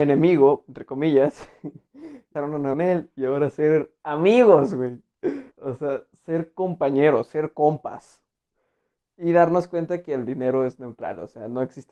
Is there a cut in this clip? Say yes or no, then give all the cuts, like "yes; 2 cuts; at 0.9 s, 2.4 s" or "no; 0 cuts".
yes; 3 cuts; at 2.4 s, 2.7 s, 5.5 s